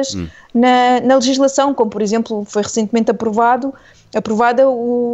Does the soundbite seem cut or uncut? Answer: uncut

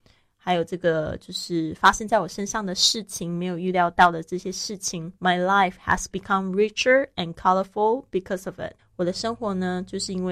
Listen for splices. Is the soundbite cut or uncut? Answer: cut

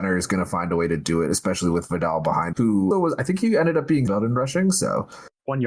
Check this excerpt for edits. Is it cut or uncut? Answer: cut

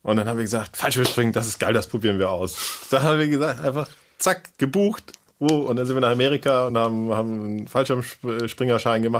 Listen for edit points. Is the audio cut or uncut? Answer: uncut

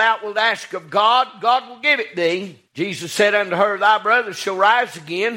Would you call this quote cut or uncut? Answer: cut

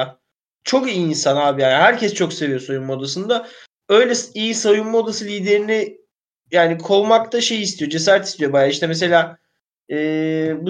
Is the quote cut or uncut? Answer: uncut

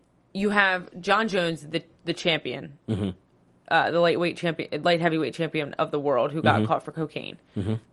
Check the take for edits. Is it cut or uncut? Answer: uncut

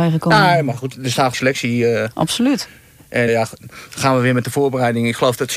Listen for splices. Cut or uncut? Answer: cut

